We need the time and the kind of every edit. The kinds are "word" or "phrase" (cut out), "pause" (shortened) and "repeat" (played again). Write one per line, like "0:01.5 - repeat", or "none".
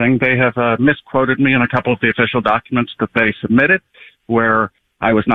none